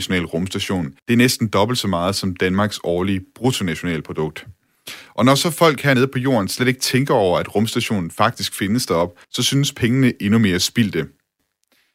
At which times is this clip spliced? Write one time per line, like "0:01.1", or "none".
0:01.0
0:09.2